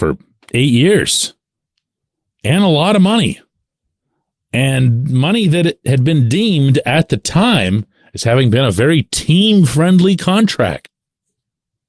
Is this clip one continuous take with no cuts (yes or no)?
yes